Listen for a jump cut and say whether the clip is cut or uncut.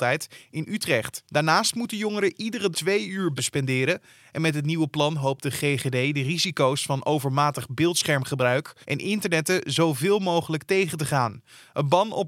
cut